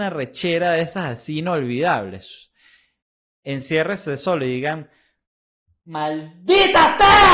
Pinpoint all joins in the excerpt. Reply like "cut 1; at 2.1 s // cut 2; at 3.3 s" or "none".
none